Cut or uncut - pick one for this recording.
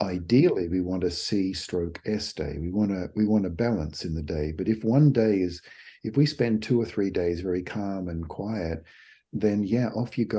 uncut